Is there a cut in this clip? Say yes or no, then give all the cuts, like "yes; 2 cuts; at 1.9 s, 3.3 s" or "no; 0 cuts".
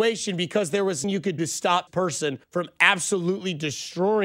yes; 4 cuts; at 1.0 s, 1.4 s, 1.9 s, 2.4 s